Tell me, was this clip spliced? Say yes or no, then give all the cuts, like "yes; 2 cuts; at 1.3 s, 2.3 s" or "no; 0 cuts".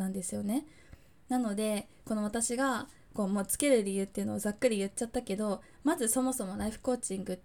no; 0 cuts